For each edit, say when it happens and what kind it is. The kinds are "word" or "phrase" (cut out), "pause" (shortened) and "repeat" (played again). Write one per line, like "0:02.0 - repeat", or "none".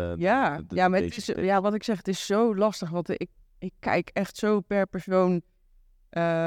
none